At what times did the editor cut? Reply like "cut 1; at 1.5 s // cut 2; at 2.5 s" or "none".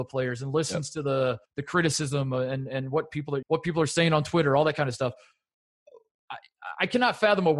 cut 1; at 1.5 s // cut 2; at 3.4 s

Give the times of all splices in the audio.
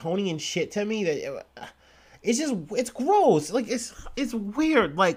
none

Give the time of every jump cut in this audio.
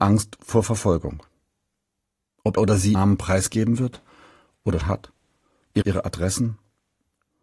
cut 1; at 2.6 s // cut 2; at 2.9 s // cut 3; at 4.8 s // cut 4; at 5.8 s

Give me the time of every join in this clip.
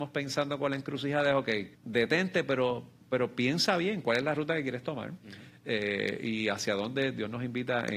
cut 1; at 1.7 s

